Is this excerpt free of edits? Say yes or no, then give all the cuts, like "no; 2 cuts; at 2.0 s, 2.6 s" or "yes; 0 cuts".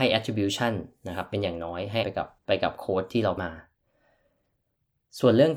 no; 3 cuts; at 2.0 s, 2.4 s, 3.4 s